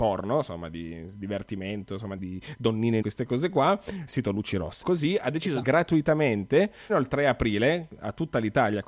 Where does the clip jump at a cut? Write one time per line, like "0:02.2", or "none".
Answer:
0:02.2
0:03.0
0:04.1
0:04.8
0:05.6
0:06.9